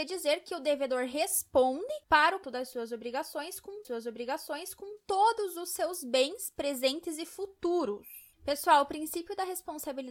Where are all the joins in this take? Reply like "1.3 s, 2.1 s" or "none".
2.0 s, 2.4 s, 3.8 s, 8.3 s